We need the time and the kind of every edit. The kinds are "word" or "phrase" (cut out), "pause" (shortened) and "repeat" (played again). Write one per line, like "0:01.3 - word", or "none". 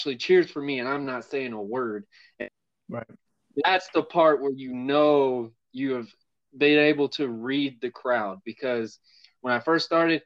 none